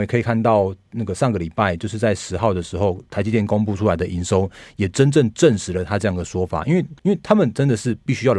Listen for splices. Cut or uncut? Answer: cut